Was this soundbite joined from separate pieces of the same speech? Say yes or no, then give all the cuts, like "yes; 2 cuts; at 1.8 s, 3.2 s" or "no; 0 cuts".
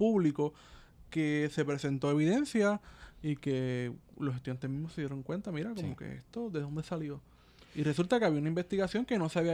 no; 0 cuts